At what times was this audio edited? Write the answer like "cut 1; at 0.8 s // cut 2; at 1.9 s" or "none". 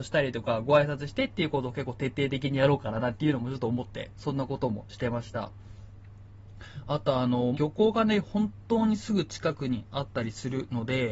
cut 1; at 7.5 s